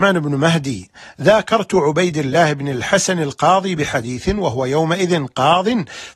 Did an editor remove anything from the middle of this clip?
no; 0 cuts

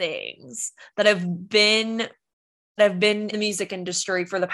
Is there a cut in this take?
yes; 2 cuts; at 2.8 s, 3.3 s

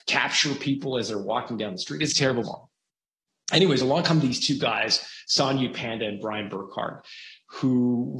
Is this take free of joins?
no; 2 cuts; at 2.1 s, 2.4 s

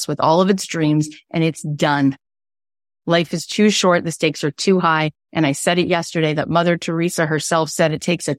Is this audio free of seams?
yes; 0 cuts

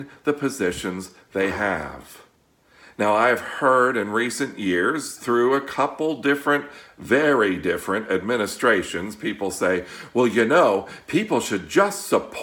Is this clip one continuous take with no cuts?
yes; 0 cuts

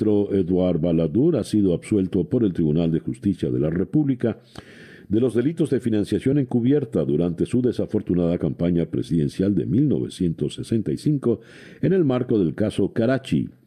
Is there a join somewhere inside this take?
no; 0 cuts

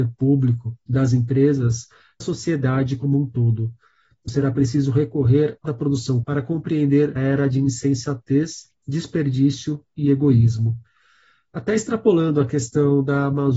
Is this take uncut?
no; 5 cuts; at 2.2 s, 4.3 s, 5.7 s, 6.2 s, 7.2 s

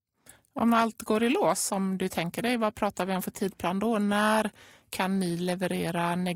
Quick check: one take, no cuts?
yes; 0 cuts

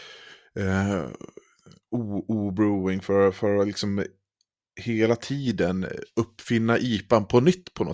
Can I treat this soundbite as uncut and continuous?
yes; 0 cuts

